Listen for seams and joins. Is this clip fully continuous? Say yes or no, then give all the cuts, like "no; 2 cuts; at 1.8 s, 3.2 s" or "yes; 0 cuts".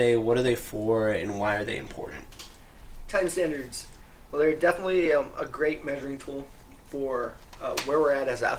yes; 0 cuts